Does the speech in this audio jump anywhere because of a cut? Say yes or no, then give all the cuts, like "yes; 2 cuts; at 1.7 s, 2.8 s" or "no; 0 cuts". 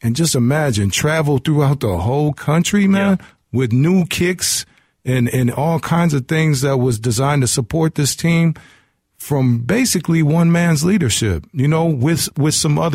no; 0 cuts